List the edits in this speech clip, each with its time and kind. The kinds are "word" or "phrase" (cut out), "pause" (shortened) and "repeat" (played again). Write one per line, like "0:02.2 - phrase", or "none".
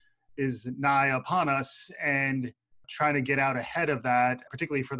none